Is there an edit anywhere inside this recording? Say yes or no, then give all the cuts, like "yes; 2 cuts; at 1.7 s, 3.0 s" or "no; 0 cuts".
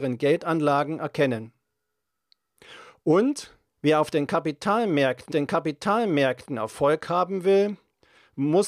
yes; 2 cuts; at 3.7 s, 5.3 s